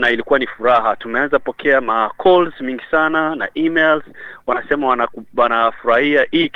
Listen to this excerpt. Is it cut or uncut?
uncut